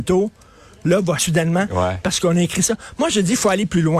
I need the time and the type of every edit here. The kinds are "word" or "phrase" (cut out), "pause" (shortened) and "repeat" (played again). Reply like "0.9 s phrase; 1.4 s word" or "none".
1.2 s word